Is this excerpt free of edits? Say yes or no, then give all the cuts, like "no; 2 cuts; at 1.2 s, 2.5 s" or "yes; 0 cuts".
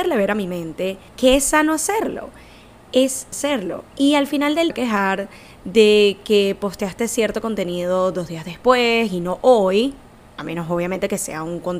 no; 4 cuts; at 1.1 s, 3.3 s, 3.9 s, 4.7 s